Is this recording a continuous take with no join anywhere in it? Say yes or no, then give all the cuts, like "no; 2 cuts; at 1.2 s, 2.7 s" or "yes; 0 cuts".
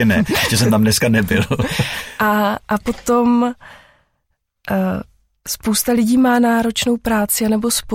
yes; 0 cuts